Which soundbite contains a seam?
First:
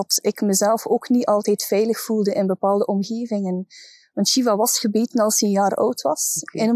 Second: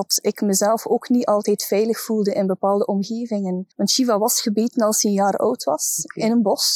second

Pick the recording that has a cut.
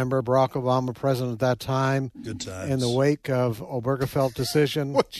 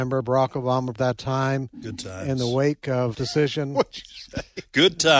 second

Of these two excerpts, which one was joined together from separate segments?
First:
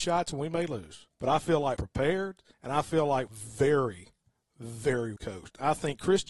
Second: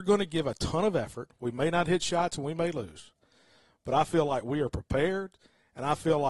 first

